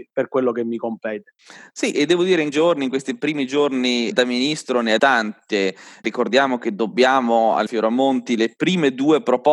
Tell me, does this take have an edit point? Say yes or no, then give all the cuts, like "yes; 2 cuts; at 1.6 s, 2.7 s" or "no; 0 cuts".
yes; 5 cuts; at 1.9 s, 2.5 s, 4.1 s, 5.0 s, 7.7 s